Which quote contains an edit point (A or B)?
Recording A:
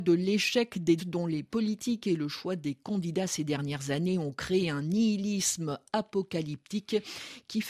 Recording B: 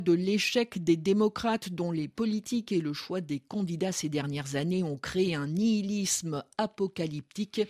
A